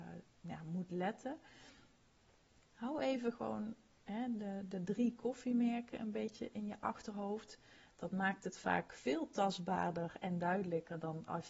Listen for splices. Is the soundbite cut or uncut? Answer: uncut